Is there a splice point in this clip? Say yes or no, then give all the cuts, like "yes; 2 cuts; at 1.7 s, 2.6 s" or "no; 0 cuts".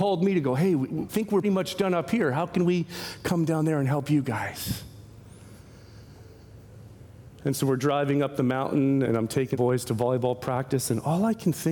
yes; 4 cuts; at 1.1 s, 1.4 s, 9.0 s, 9.5 s